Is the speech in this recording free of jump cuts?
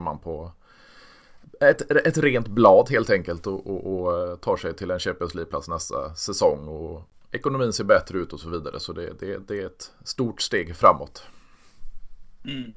yes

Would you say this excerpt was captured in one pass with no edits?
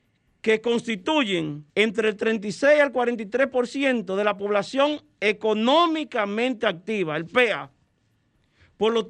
no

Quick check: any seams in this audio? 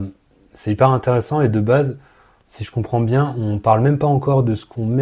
no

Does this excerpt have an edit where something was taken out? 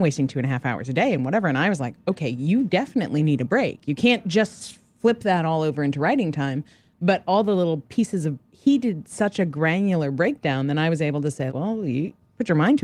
yes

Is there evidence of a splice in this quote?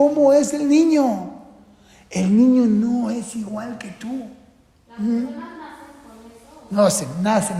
no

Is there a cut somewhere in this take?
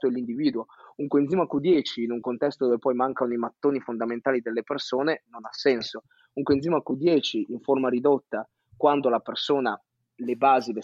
no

